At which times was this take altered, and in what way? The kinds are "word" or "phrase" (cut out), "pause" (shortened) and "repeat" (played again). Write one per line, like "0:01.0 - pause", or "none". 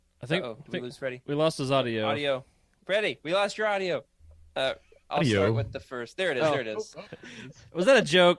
none